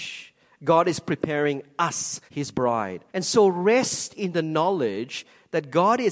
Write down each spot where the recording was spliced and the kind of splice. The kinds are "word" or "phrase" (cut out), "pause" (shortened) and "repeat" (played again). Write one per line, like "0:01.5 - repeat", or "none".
0:02.3 - pause
0:03.1 - pause